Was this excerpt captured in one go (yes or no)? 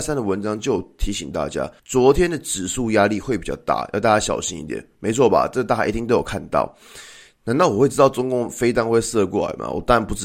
no